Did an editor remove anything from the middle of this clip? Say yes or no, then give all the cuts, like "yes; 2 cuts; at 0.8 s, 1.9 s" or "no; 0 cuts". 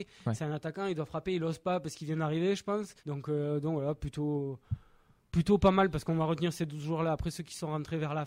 yes; 1 cut; at 3.0 s